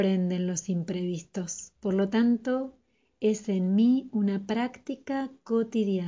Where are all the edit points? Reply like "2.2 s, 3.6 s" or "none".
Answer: 1.8 s